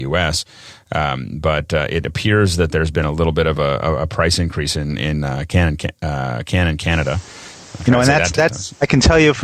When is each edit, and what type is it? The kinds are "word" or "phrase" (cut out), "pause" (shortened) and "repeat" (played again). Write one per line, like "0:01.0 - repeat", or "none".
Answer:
none